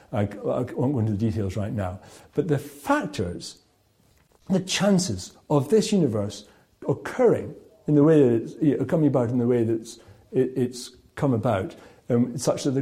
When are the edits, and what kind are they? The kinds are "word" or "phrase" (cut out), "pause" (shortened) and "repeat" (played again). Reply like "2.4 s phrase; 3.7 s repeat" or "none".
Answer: none